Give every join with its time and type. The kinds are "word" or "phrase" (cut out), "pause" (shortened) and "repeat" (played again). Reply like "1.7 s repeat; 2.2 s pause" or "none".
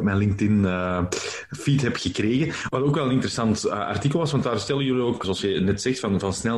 5.2 s word

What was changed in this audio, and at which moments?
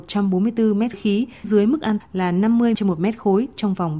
0.9 s word; 1.4 s word; 2.0 s word; 2.7 s word

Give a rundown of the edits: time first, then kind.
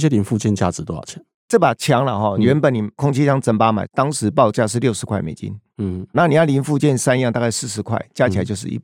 6.1 s word

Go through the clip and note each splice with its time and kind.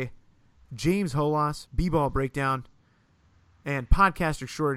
1.7 s word

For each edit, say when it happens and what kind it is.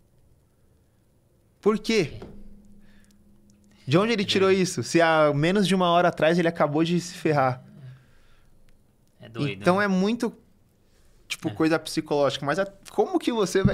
none

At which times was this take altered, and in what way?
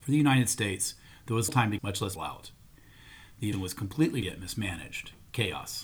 1.5 s word; 1.8 s phrase; 2.2 s phrase; 3.5 s word; 4.2 s word

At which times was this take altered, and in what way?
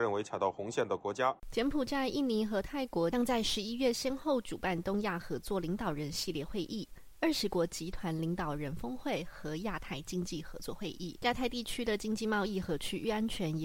1.4 s pause

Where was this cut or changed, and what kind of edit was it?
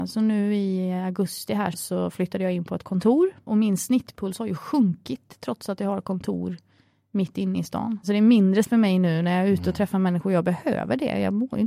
1.7 s word; 8.6 s word

